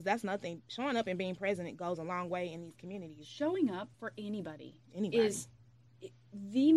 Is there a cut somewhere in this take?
yes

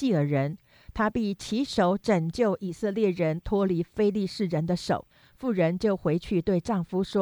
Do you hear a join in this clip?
no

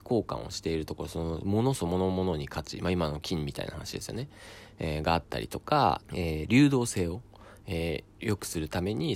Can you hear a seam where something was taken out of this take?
yes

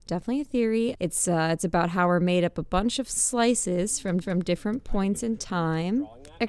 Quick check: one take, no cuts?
no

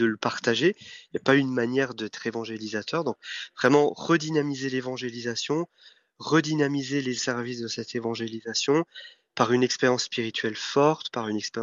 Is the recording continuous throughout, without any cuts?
no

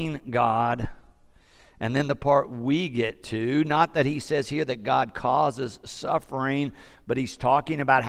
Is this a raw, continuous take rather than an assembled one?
yes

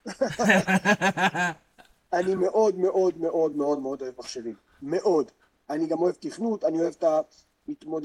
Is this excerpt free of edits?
yes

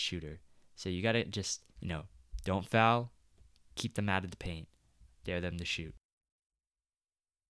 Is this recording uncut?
no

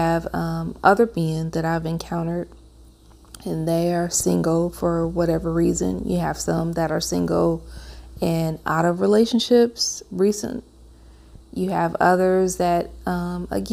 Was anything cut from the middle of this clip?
no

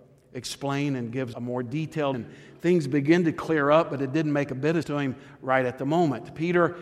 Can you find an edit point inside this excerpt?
yes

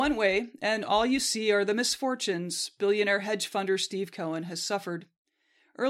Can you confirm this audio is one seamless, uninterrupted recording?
yes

